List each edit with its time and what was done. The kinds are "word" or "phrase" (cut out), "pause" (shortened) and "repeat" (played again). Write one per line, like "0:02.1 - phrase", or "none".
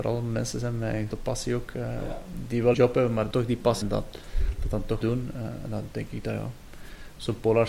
0:01.1 - word
0:02.7 - word
0:03.3 - word
0:03.8 - word
0:05.0 - word